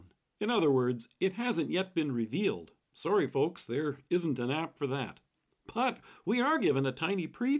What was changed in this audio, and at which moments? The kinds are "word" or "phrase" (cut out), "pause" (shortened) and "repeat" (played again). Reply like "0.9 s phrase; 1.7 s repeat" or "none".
none

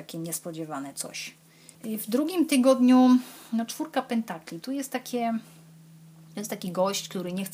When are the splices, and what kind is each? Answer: 1.7 s pause

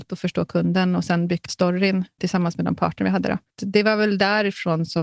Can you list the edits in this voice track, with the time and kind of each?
1.5 s word; 2.2 s word

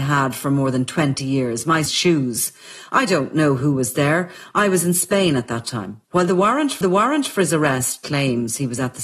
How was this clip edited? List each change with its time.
1.9 s word; 6.0 s pause; 6.8 s repeat

